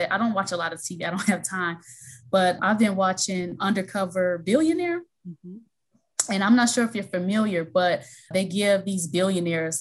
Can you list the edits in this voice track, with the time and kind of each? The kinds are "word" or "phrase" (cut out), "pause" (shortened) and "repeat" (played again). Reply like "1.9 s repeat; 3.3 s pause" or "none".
2.6 s word; 3.6 s word; 8.3 s word